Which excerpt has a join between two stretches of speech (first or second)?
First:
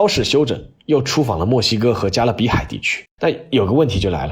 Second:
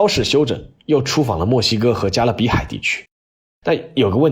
first